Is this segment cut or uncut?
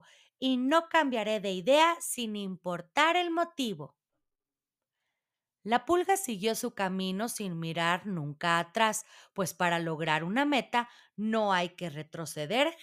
uncut